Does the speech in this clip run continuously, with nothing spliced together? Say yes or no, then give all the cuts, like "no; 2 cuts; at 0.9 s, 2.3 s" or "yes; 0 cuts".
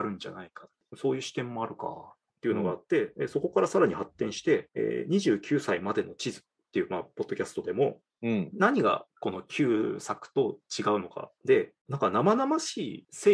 no; 1 cut; at 9.1 s